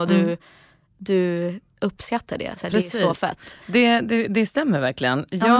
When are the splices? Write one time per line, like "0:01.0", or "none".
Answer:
none